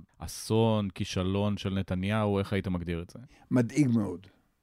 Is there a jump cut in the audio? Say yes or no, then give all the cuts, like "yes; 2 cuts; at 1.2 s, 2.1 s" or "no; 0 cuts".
no; 0 cuts